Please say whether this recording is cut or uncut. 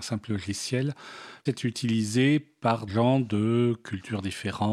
cut